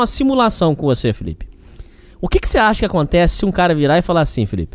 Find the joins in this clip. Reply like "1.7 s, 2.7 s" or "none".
none